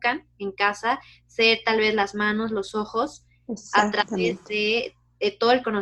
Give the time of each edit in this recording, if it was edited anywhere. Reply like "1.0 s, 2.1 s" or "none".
none